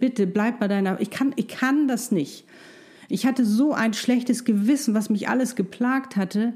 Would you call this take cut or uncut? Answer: uncut